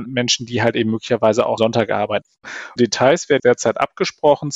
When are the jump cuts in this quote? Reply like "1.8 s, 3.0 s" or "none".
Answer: 1.6 s, 2.8 s, 3.4 s